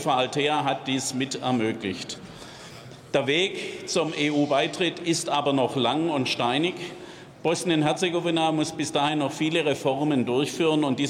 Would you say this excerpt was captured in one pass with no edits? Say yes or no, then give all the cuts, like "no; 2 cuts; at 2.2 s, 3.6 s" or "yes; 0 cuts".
yes; 0 cuts